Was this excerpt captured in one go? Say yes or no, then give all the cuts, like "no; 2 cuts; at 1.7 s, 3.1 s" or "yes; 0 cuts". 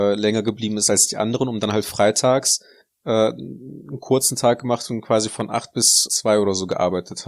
no; 1 cut; at 6.1 s